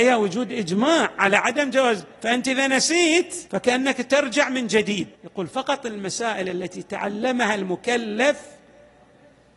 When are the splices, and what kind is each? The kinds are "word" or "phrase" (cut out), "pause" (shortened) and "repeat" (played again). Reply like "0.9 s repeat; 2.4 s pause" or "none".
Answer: 2.2 s pause; 3.5 s pause; 5.1 s pause